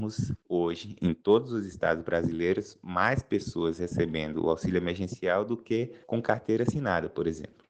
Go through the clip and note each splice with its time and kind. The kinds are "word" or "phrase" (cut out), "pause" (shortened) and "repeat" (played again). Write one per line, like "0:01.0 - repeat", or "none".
0:06.0 - pause